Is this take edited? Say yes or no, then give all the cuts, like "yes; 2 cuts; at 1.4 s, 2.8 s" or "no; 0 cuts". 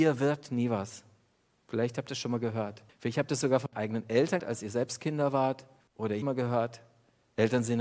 yes; 6 cuts; at 1.3 s, 2.9 s, 3.7 s, 4.4 s, 5.8 s, 6.2 s